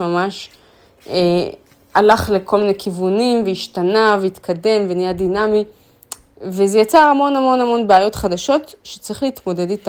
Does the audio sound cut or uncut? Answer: uncut